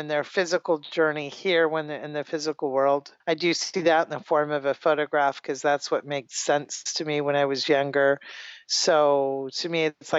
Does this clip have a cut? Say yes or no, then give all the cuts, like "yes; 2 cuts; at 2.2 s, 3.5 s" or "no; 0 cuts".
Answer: yes; 1 cut; at 3.2 s